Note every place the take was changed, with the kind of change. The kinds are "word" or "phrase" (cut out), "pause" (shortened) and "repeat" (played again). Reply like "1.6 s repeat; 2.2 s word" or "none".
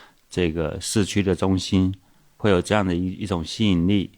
none